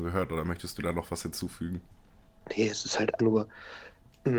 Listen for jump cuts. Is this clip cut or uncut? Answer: cut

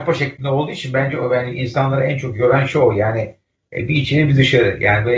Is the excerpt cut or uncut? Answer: uncut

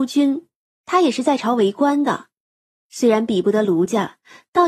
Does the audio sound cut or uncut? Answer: uncut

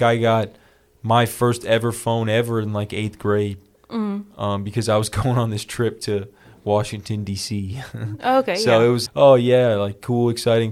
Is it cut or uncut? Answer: cut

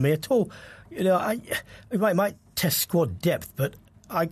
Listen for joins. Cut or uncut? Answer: uncut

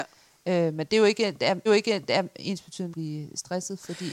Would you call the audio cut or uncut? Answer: cut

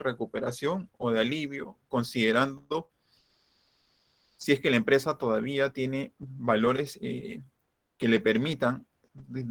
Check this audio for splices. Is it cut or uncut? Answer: uncut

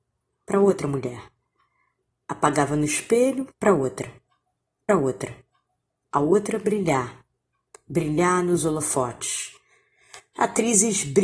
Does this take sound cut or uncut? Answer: cut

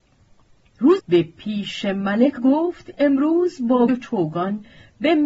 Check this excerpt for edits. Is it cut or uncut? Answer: cut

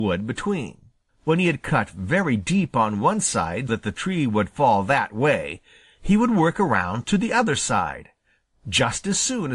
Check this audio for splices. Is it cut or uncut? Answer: cut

